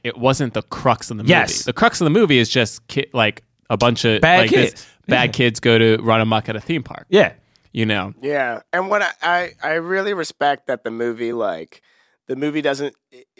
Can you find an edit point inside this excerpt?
no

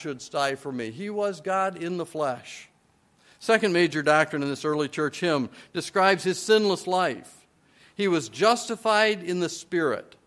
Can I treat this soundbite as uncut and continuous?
yes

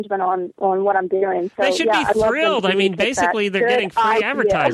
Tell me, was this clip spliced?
no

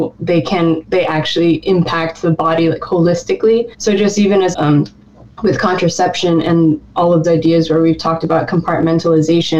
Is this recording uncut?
no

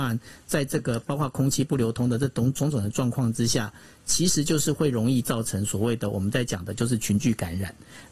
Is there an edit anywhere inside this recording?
no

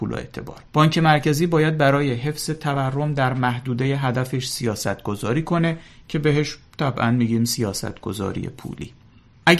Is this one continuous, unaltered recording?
yes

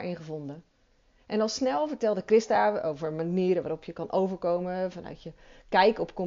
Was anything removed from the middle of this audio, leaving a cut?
no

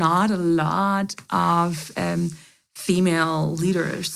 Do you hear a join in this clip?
no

